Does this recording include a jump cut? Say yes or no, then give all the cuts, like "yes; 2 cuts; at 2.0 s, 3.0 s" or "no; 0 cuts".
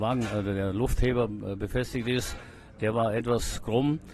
no; 0 cuts